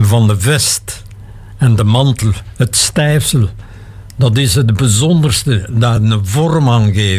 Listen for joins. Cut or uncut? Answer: uncut